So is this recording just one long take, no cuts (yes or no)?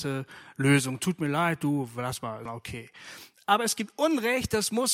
no